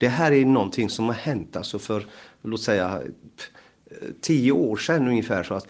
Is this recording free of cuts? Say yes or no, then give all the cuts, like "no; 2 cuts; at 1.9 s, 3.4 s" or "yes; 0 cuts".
yes; 0 cuts